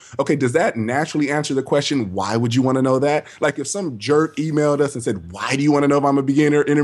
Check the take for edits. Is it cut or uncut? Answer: uncut